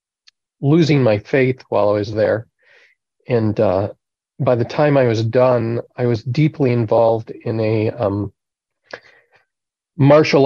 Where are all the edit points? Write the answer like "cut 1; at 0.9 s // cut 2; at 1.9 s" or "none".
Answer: none

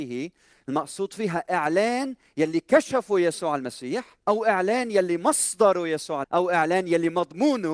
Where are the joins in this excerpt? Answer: cut 1; at 4.2 s // cut 2; at 6.2 s

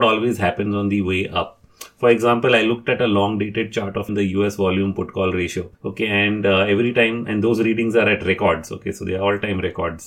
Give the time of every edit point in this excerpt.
cut 1; at 4.1 s // cut 2; at 5.7 s

